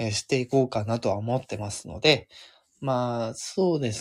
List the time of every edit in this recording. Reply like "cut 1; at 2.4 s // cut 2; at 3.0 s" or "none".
none